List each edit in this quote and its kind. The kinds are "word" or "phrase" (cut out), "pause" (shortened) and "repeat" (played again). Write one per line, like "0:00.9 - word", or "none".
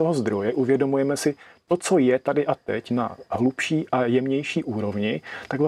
none